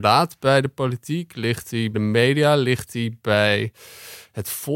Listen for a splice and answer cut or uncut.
cut